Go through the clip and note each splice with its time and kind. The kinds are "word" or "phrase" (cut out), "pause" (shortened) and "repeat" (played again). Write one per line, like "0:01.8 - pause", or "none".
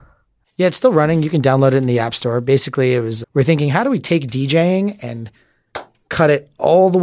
0:03.2 - word

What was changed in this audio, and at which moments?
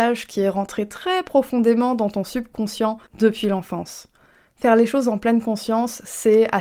0:03.1 - pause

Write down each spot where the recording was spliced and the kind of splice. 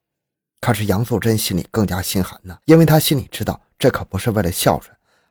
0:02.6 - pause

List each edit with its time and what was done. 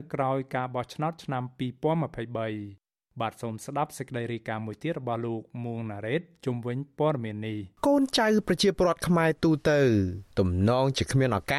0:07.8 - pause
0:10.3 - pause

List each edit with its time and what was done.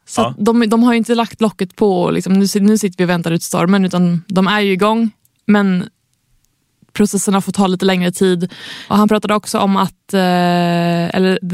none

